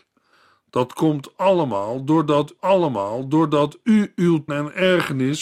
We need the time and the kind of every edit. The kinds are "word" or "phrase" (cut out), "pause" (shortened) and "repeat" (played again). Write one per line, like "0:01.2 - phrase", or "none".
0:02.6 - repeat
0:04.5 - word